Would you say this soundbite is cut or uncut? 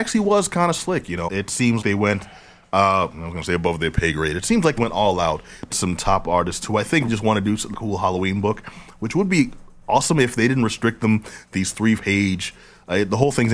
cut